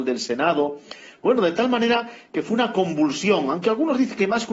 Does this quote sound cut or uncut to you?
uncut